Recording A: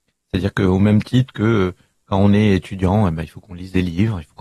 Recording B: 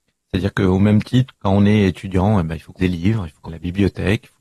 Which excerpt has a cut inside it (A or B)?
B